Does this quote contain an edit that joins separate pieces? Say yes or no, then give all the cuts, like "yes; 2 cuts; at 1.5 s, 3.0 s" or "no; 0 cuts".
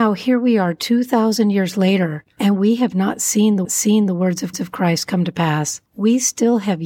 yes; 3 cuts; at 3.6 s, 4.5 s, 5.9 s